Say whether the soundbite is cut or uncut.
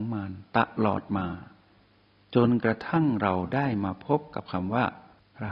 uncut